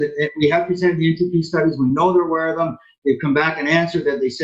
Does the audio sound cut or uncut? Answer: uncut